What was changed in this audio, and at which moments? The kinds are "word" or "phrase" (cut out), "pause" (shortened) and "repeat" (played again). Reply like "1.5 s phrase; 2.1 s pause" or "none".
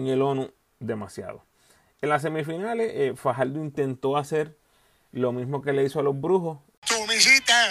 none

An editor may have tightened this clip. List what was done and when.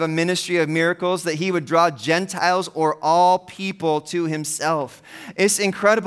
none

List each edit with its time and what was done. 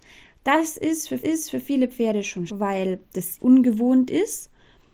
1.2 s repeat; 2.5 s word; 3.4 s word

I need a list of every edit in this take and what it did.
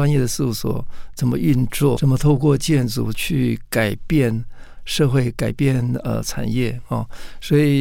2.0 s word

